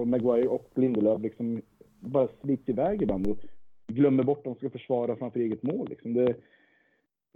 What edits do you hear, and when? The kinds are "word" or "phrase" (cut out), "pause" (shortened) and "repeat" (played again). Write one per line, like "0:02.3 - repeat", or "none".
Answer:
none